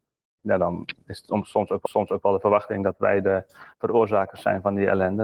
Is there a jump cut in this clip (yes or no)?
yes